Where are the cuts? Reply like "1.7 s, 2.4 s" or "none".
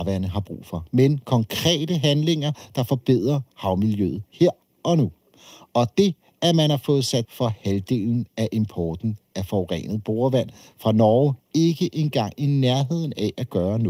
7.2 s, 11.4 s